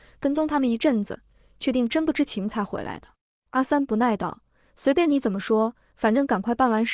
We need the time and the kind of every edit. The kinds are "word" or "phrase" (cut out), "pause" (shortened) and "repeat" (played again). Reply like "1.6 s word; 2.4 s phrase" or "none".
3.1 s pause